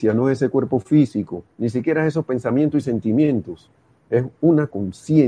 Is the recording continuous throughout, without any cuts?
no; 1 cut; at 1.5 s

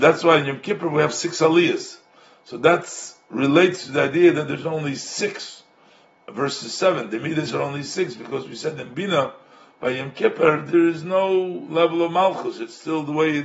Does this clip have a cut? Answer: no; 0 cuts

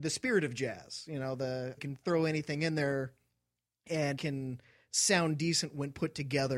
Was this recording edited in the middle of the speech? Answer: yes; 2 cuts; at 1.8 s, 4.2 s

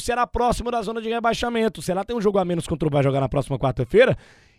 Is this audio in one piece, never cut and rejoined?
no; 1 cut; at 2.9 s

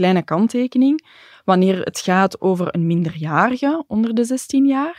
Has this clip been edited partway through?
no; 0 cuts

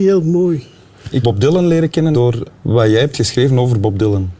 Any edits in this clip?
yes; 3 cuts; at 1.2 s, 2.1 s, 2.5 s

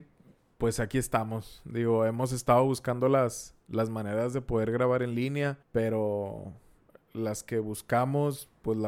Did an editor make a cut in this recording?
yes; 1 cut; at 5.6 s

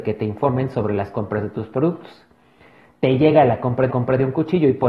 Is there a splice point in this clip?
yes; 1 cut; at 3.9 s

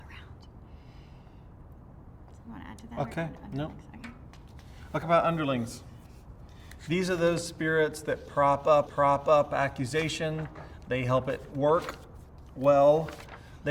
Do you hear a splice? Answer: yes; 2 cuts; at 5.0 s, 8.9 s

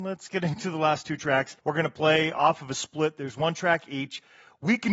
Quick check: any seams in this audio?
yes; 1 cut; at 1.6 s

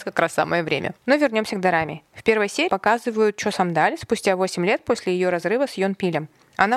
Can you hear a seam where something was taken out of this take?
yes; 2 cuts; at 1.0 s, 2.7 s

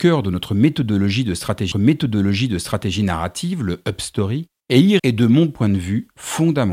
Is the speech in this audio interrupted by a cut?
yes; 3 cuts; at 1.7 s, 4.6 s, 5.0 s

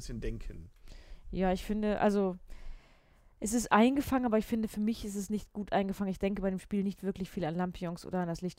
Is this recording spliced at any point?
no; 0 cuts

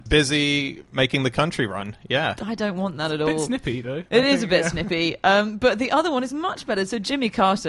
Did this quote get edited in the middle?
no; 0 cuts

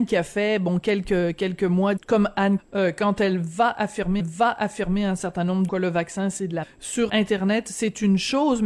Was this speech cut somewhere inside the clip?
yes; 6 cuts; at 2.0 s, 2.6 s, 4.2 s, 5.7 s, 6.6 s, 7.1 s

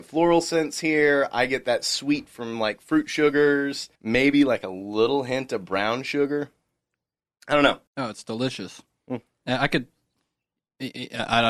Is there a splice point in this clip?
yes; 2 cuts; at 4.0 s, 7.9 s

